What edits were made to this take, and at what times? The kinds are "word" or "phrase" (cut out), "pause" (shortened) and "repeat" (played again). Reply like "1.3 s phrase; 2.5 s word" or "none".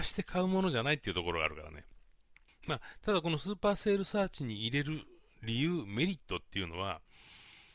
none